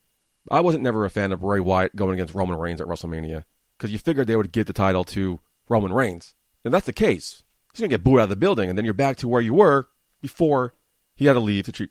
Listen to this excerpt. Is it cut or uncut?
uncut